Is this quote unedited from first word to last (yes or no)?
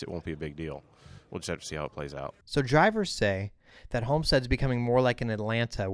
no